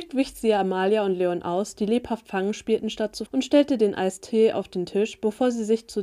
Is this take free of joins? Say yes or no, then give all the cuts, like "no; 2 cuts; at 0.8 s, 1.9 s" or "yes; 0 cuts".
no; 1 cut; at 3.3 s